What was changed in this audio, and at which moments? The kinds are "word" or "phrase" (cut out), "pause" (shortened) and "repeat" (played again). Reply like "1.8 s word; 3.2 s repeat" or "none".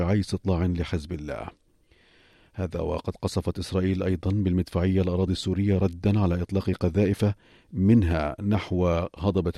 none